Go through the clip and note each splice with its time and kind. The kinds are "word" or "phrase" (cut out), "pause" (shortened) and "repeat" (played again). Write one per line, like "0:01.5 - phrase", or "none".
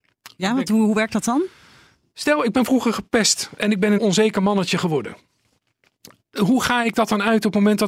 0:04.0 - word